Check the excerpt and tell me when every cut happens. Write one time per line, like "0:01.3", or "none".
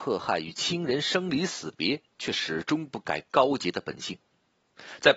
0:02.1